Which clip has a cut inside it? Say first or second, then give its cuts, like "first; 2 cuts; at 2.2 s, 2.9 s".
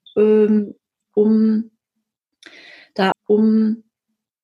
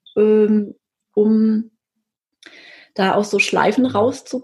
first; 1 cut; at 3.1 s